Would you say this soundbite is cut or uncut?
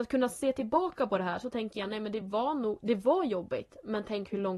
uncut